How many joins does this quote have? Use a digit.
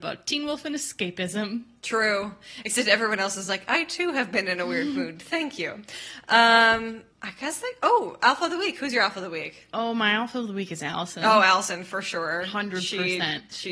1